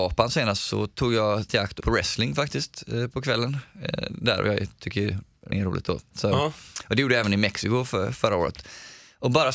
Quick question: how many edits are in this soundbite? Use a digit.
3